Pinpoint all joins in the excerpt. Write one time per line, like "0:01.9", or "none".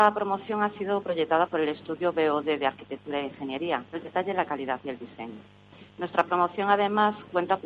0:03.9
0:05.9